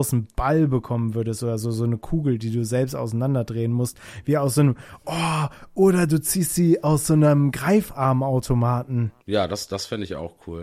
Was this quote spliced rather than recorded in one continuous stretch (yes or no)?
yes